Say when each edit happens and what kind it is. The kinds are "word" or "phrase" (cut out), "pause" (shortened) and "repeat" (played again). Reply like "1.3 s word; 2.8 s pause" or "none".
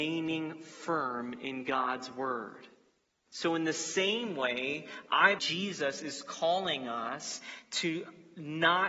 5.4 s word